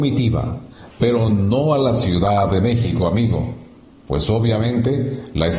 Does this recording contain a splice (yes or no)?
no